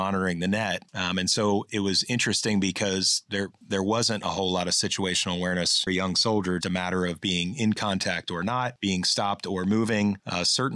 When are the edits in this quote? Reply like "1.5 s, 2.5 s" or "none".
5.9 s, 6.6 s